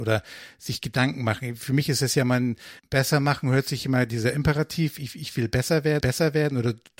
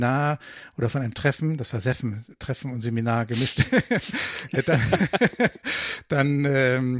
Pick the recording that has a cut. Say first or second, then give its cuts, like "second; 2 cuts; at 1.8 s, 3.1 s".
first; 2 cuts; at 2.8 s, 6.0 s